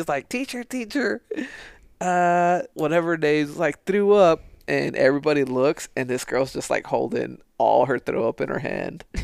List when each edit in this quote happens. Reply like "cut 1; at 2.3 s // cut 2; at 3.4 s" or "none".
cut 1; at 2.7 s

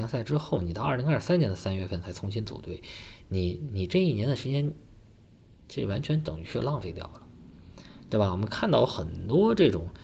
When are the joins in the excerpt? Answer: none

